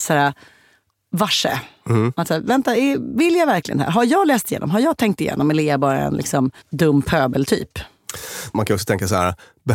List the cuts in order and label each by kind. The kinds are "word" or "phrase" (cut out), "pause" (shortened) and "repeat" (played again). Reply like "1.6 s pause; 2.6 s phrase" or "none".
6.6 s pause